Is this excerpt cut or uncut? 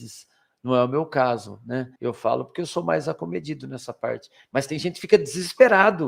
cut